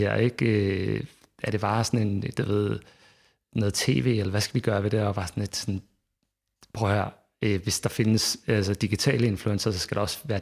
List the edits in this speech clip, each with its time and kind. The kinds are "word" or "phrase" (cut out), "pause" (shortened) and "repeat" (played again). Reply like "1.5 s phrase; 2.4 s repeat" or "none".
none